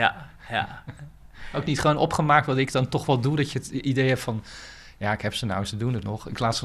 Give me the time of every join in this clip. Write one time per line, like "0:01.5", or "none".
none